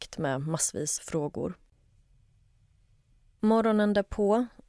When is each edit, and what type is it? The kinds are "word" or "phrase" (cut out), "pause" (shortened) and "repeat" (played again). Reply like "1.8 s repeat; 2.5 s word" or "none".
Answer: 1.0 s word

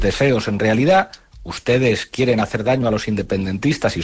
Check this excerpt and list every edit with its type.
none

